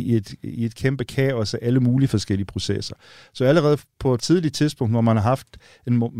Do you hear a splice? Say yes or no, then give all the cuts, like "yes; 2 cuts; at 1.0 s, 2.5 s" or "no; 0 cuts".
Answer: yes; 1 cut; at 4.2 s